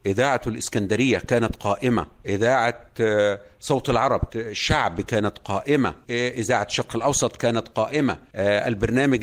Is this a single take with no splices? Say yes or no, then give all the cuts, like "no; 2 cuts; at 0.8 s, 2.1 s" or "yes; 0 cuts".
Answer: no; 1 cut; at 4.3 s